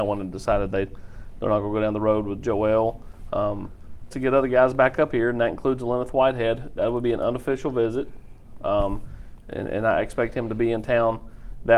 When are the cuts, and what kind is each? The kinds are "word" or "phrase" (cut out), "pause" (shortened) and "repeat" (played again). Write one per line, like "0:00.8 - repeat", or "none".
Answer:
0:04.1 - phrase